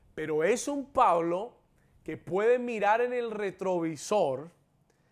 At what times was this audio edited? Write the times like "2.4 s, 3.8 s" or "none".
none